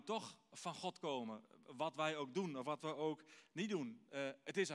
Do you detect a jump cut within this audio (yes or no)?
no